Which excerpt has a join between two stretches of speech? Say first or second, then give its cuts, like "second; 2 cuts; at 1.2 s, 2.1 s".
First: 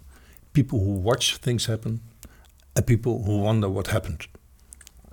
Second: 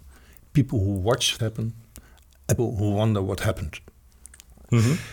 second; 2 cuts; at 1.4 s, 2.6 s